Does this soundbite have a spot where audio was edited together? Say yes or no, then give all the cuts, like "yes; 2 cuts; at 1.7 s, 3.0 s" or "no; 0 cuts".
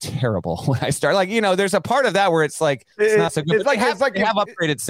yes; 1 cut; at 2.9 s